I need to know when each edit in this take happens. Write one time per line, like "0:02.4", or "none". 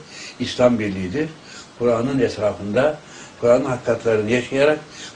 0:03.4